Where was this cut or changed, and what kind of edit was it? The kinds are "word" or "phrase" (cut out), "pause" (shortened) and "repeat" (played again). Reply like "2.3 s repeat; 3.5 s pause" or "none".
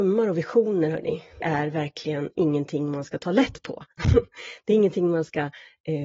1.4 s word